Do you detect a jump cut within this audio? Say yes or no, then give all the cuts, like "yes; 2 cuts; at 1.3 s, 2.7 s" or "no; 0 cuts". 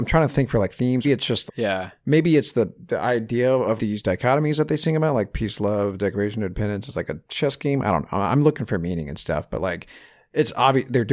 yes; 3 cuts; at 1.0 s, 1.5 s, 3.8 s